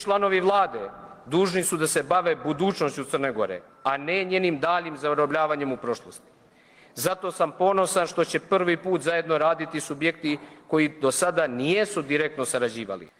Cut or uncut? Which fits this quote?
uncut